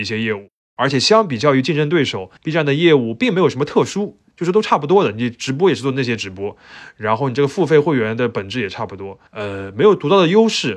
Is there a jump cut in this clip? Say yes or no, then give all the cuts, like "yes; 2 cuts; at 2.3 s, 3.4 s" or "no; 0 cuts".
yes; 2 cuts; at 2.4 s, 9.3 s